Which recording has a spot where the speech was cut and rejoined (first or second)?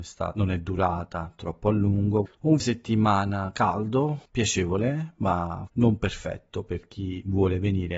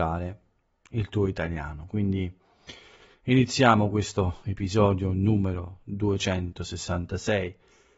first